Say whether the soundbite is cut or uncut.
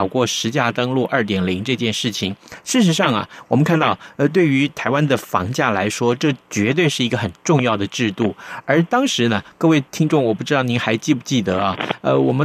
cut